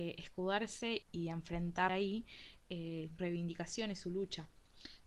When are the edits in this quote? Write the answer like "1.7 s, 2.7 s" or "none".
1.0 s, 1.9 s, 3.2 s

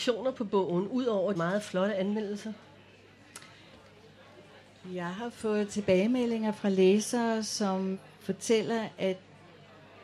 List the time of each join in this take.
1.3 s

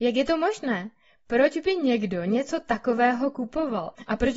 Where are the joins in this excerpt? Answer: none

